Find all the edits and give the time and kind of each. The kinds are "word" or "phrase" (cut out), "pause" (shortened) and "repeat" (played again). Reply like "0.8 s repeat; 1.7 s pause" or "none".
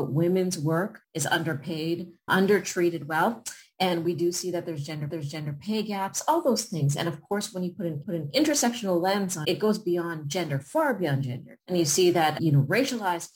1.0 s pause; 2.3 s word; 5.1 s repeat; 8.0 s repeat; 9.4 s word; 11.6 s pause; 12.4 s word